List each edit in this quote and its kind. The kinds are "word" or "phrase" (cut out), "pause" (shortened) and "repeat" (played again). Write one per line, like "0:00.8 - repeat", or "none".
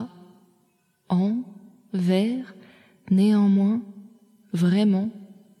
none